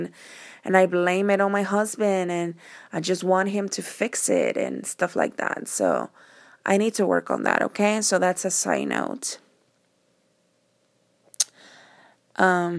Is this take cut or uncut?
uncut